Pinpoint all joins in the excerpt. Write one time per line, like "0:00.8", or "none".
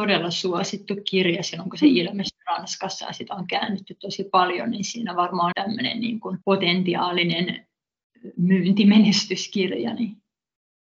0:05.5
0:06.4